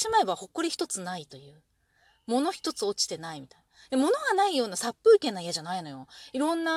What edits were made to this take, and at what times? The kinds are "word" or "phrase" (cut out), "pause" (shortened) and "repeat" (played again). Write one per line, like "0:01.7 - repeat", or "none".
none